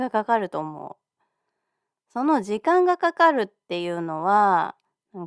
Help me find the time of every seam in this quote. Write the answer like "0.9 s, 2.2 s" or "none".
none